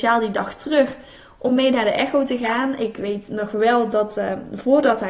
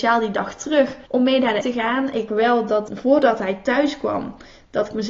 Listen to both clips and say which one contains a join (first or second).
second